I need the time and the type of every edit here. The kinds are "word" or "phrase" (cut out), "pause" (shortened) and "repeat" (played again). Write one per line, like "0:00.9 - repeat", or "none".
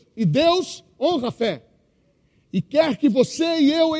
none